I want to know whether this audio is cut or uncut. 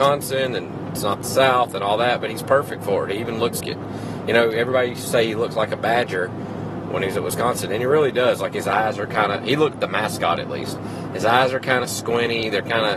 cut